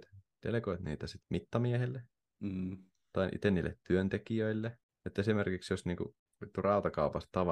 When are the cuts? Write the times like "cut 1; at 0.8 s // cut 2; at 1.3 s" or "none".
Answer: cut 1; at 1.2 s